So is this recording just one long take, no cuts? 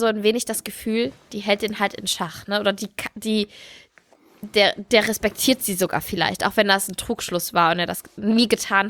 yes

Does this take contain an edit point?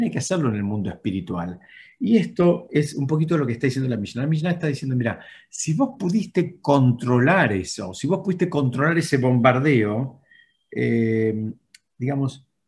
no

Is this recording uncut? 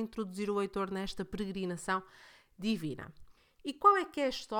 no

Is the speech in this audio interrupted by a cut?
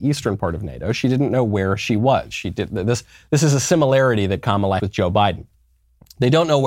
yes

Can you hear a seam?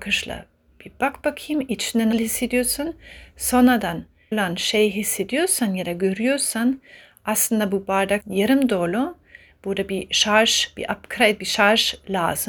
yes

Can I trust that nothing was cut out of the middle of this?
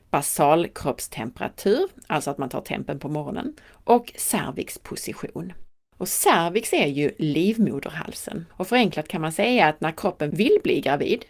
no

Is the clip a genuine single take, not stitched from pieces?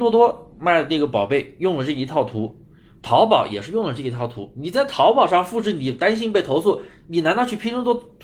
yes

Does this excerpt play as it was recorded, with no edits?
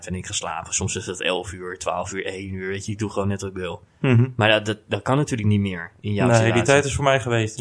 yes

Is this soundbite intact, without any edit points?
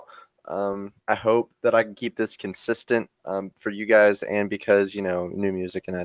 no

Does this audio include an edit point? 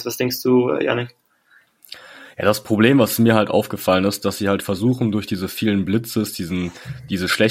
no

